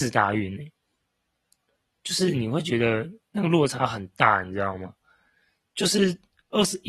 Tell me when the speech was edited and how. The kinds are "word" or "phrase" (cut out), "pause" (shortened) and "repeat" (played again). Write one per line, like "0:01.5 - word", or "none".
none